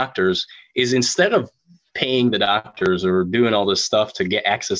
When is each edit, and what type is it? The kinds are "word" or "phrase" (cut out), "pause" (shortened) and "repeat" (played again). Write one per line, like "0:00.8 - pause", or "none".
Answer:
none